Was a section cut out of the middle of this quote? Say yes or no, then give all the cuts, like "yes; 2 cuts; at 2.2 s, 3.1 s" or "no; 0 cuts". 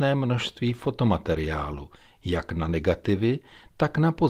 no; 0 cuts